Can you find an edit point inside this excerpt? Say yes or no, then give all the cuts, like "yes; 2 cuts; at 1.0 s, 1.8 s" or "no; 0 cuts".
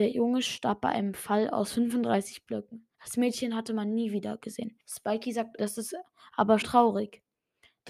yes; 4 cuts; at 2.9 s, 4.8 s, 5.6 s, 6.6 s